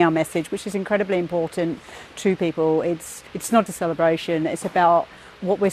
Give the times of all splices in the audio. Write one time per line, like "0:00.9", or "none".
0:03.3
0:03.7